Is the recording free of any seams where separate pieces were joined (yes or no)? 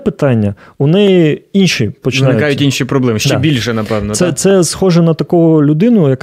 yes